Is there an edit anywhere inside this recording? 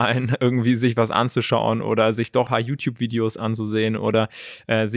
yes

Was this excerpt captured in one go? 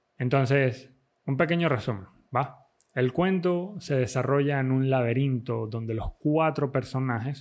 yes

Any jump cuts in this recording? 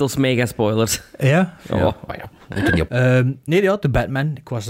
yes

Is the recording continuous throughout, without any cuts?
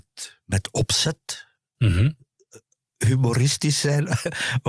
yes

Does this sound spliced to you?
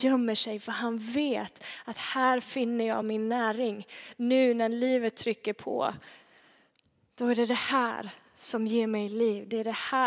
no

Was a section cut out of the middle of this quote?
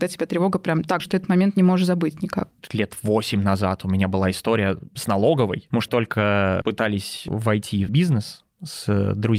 yes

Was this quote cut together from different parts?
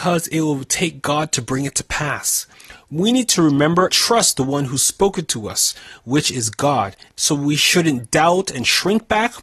yes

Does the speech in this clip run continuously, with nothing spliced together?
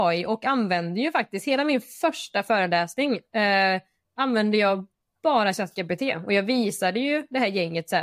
yes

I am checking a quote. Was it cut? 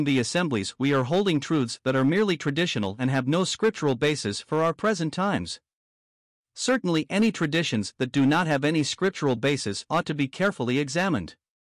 no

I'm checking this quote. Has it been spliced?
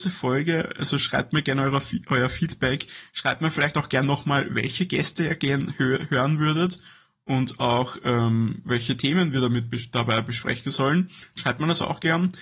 no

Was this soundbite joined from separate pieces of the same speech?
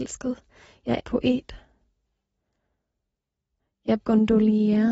yes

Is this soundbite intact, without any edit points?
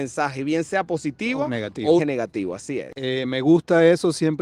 no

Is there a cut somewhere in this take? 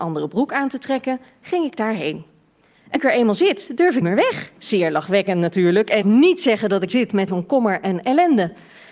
yes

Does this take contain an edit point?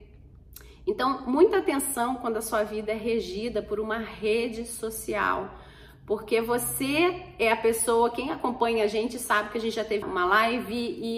yes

